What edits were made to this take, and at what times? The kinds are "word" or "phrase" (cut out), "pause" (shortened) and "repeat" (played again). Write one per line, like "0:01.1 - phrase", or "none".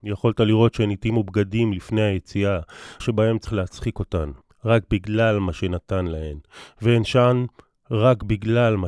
0:03.0 - word
0:03.4 - word
0:04.4 - pause